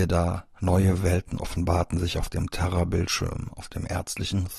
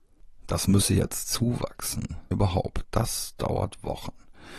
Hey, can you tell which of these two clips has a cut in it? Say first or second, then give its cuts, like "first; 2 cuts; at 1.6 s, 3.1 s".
second; 2 cuts; at 2.3 s, 2.8 s